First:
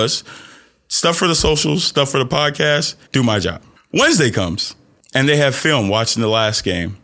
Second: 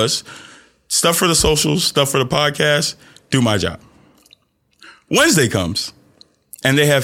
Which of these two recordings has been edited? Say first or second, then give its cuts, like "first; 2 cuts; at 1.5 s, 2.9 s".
first; 3 cuts; at 3.1 s, 3.8 s, 5.0 s